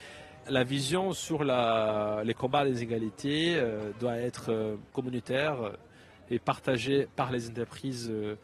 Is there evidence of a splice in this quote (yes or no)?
no